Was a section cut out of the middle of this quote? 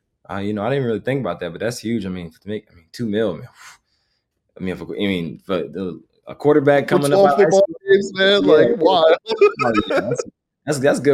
no; 0 cuts

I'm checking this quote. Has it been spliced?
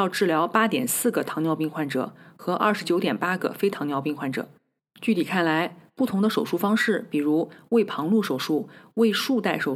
yes; 1 cut; at 4.8 s

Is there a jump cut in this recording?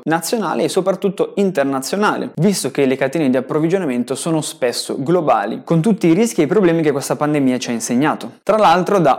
no; 0 cuts

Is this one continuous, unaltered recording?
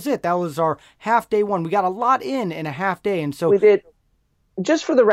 yes; 0 cuts

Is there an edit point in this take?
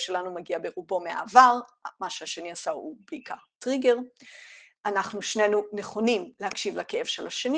no; 0 cuts

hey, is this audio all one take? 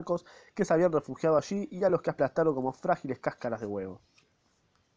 yes; 0 cuts

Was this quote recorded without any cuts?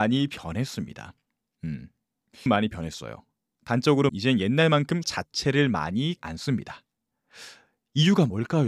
no; 4 cuts; at 2.5 s, 4.1 s, 5.0 s, 6.2 s

